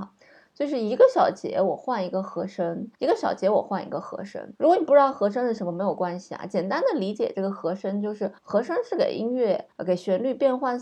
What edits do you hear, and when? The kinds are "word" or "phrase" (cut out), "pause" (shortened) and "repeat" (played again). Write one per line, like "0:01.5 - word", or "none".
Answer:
0:02.9 - pause
0:04.5 - pause
0:08.4 - pause
0:09.7 - pause